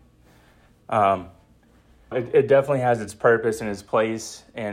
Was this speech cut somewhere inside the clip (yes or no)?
yes